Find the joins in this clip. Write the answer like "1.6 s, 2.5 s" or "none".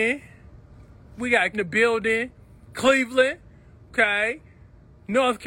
1.5 s